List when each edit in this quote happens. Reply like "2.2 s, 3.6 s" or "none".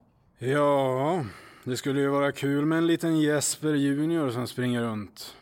none